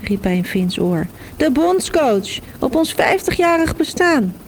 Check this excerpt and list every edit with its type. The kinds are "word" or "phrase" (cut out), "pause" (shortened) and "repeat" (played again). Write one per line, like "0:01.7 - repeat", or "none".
none